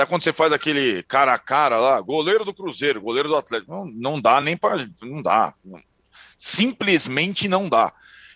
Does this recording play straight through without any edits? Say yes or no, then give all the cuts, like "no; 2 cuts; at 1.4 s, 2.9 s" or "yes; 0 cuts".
yes; 0 cuts